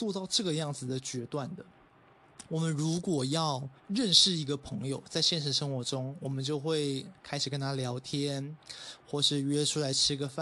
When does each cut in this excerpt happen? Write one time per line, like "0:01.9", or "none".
0:03.8